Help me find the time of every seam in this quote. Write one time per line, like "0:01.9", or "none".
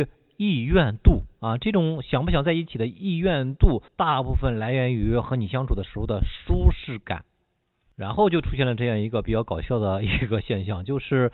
0:01.3
0:03.9